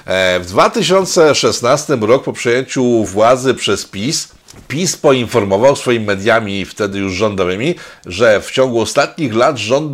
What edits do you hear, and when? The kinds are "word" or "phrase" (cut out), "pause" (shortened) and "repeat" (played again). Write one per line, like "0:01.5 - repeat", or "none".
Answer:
none